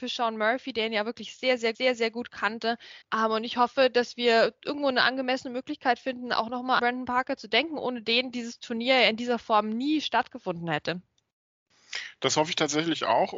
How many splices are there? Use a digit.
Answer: 3